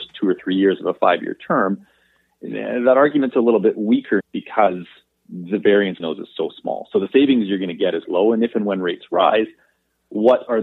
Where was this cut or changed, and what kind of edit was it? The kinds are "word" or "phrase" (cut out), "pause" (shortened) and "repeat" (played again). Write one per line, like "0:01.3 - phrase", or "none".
0:04.2 - word
0:06.0 - word
0:08.0 - word